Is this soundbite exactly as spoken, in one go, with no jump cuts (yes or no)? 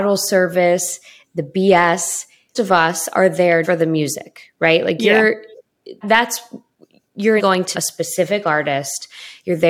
no